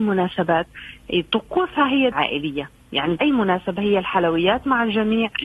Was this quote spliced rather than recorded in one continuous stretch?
yes; 2 cuts; at 2.1 s, 3.2 s

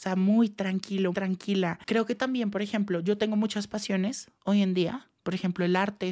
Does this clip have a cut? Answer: yes; 3 cuts; at 1.1 s, 4.4 s, 5.2 s

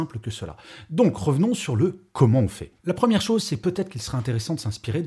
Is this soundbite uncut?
no; 1 cut; at 2.8 s

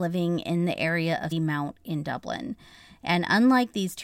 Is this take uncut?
no; 1 cut; at 1.3 s

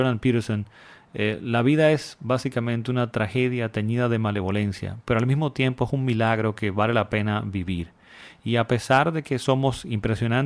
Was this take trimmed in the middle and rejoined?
no; 0 cuts

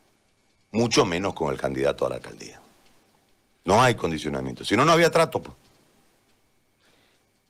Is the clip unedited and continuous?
yes; 0 cuts

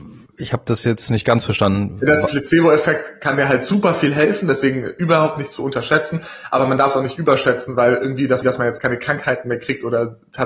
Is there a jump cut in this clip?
yes; 1 cut; at 8.4 s

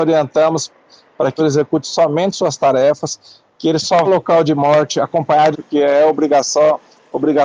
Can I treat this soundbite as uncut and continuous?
no; 3 cuts; at 1.4 s, 4.0 s, 5.5 s

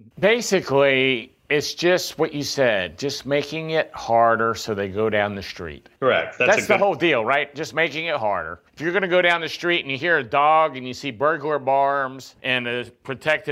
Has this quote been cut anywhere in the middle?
yes; 4 cuts; at 1.4 s, 6.0 s, 8.7 s, 12.4 s

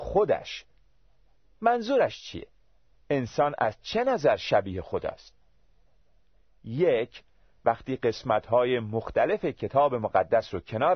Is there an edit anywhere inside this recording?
no; 0 cuts

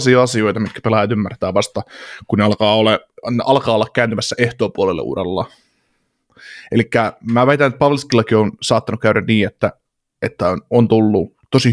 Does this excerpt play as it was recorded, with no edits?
yes; 0 cuts

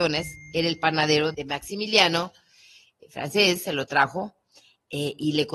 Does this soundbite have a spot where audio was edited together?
yes; 1 cut; at 1.3 s

